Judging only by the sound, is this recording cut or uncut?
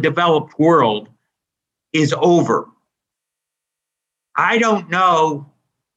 uncut